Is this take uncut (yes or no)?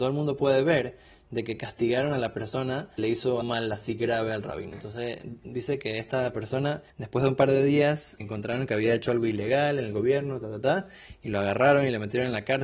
no